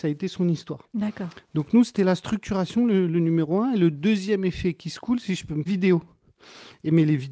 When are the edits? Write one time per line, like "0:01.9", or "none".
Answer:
0:05.7